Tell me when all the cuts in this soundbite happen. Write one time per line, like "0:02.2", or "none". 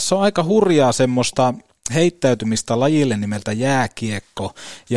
none

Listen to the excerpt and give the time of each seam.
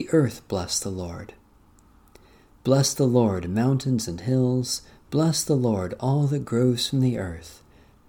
none

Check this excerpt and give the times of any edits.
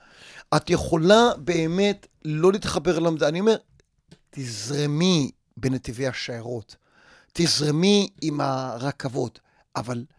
none

